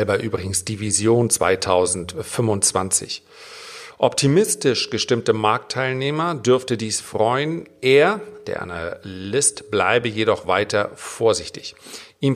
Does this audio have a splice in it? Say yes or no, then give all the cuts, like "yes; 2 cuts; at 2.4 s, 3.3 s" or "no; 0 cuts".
no; 0 cuts